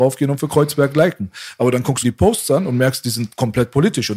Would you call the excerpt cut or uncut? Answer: cut